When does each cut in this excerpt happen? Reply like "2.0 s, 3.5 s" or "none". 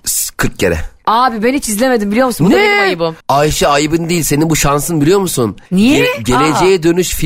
3.2 s, 5.7 s